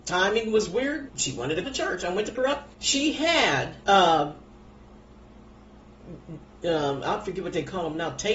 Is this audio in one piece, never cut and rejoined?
no; 5 cuts; at 1.1 s, 1.6 s, 2.3 s, 2.7 s, 3.8 s

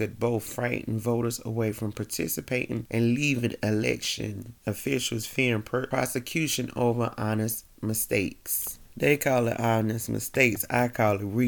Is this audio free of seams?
no; 1 cut; at 4.6 s

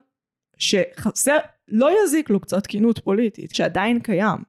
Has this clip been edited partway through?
yes; 1 cut; at 3.5 s

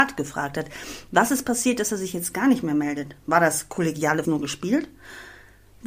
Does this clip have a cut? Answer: yes; 1 cut; at 4.2 s

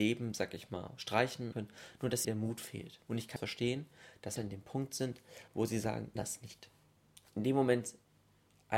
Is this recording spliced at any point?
yes; 8 cuts; at 1.5 s, 2.2 s, 3.0 s, 3.4 s, 4.4 s, 5.5 s, 6.2 s, 7.0 s

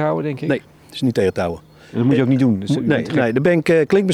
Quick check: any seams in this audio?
no; 0 cuts

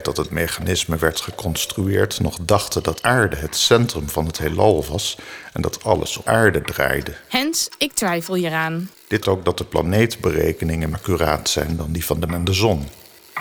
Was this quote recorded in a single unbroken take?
no; 5 cuts; at 3.0 s, 6.2 s, 9.2 s, 10.9 s, 12.3 s

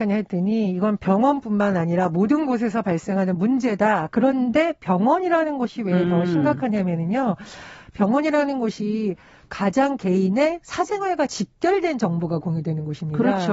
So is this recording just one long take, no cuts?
yes; 0 cuts

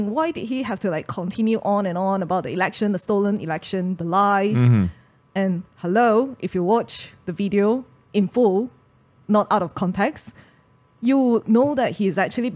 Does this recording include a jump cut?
no; 0 cuts

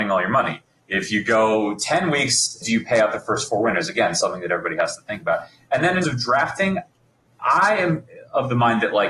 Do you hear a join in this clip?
yes; 2 cuts; at 2.6 s, 6.0 s

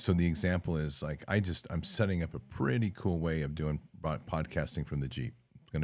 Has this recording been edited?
no; 0 cuts

